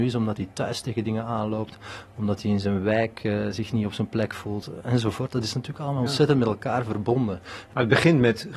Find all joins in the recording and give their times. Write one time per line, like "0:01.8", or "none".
none